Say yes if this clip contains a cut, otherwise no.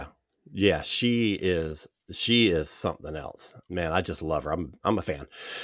no